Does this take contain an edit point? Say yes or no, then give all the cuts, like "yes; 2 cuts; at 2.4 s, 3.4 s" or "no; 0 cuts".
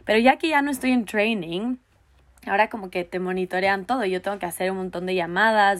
no; 0 cuts